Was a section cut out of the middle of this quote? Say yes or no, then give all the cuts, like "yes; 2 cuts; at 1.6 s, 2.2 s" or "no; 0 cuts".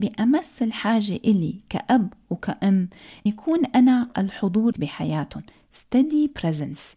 yes; 2 cuts; at 3.3 s, 4.7 s